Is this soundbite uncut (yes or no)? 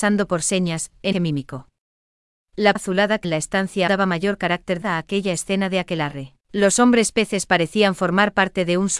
no